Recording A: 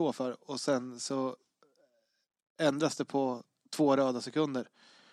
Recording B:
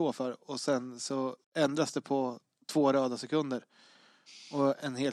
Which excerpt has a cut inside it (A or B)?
B